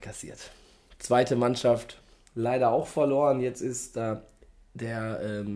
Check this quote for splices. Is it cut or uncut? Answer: uncut